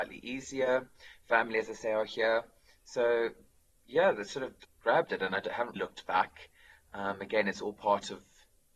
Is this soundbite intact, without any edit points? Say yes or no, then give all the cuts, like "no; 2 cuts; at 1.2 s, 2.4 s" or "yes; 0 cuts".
no; 2 cuts; at 4.6 s, 5.8 s